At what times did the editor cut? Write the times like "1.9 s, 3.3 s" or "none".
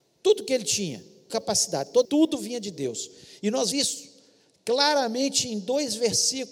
1.3 s, 2.0 s, 3.7 s

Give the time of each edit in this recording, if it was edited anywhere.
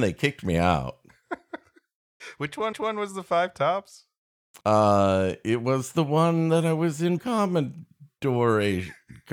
2.7 s, 4.6 s, 7.2 s

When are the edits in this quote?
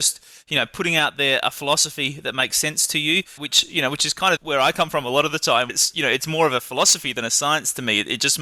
3.4 s, 4.4 s, 5.7 s

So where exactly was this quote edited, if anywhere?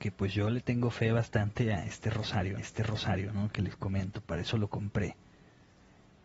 2.6 s

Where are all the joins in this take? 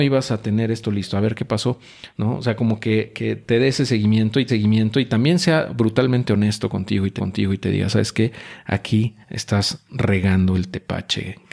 4.5 s, 7.2 s, 9.2 s

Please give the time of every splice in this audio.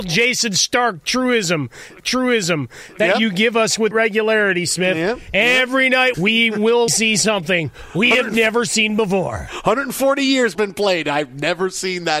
2.0 s, 3.9 s, 6.1 s, 6.9 s, 10.5 s

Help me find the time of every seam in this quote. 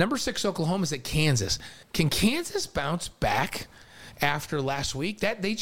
1.8 s

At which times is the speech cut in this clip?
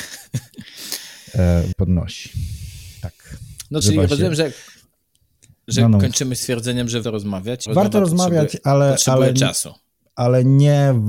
1.7 s, 3.8 s, 7.0 s, 7.7 s

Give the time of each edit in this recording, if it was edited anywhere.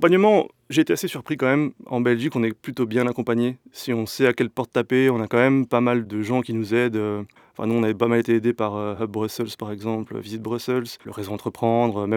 11.0 s

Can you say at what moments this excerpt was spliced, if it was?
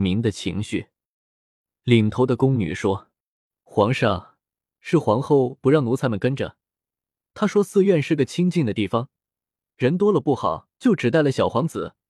10.7 s

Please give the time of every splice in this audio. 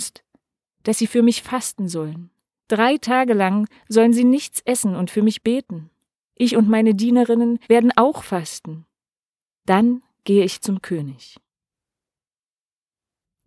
7.6 s

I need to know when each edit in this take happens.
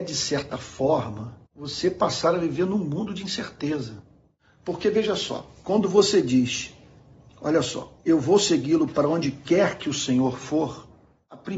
1.5 s

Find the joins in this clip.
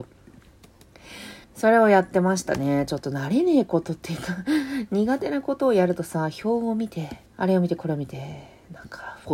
1.4 s, 7.3 s

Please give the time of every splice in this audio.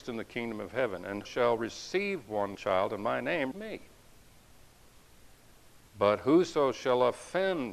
1.2 s, 2.5 s, 3.5 s

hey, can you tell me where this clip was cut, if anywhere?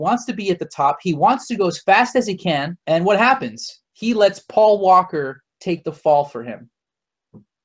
2.8 s, 3.9 s

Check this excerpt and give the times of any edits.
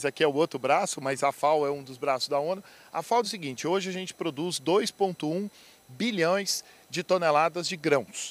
3.2 s

